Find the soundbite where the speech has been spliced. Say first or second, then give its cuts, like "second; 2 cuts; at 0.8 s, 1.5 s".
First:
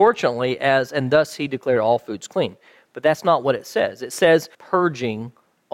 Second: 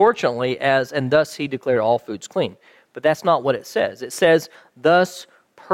first; 1 cut; at 4.5 s